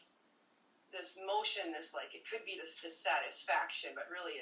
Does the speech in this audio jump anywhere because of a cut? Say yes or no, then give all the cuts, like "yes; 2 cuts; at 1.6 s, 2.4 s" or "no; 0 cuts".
yes; 1 cut; at 1.9 s